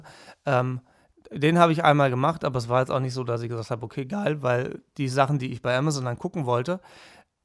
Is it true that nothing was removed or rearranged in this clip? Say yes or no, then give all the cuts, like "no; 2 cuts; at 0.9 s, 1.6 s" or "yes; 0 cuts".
yes; 0 cuts